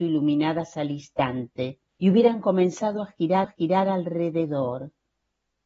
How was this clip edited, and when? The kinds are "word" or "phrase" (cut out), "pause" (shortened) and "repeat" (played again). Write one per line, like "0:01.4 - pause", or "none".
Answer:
0:01.9 - pause
0:03.4 - repeat